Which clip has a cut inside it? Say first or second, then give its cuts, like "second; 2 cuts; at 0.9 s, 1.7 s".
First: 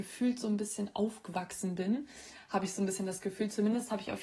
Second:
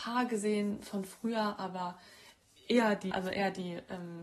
second; 1 cut; at 3.1 s